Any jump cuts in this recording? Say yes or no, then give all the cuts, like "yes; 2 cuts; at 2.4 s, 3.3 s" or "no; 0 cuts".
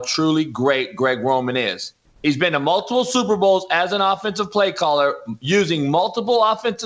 no; 0 cuts